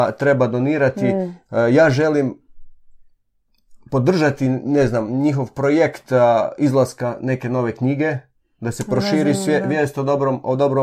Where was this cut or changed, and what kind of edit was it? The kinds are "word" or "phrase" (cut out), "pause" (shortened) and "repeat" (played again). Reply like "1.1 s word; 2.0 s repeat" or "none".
none